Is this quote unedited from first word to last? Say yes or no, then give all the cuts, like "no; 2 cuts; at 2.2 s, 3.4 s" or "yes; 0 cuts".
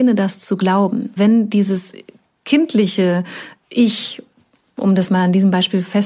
no; 1 cut; at 1.2 s